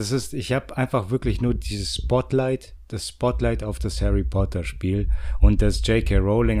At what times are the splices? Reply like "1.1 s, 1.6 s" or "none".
none